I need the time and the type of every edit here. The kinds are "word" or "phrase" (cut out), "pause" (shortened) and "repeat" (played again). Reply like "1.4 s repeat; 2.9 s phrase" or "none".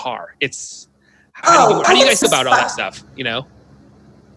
1.4 s word; 1.8 s word; 2.2 s word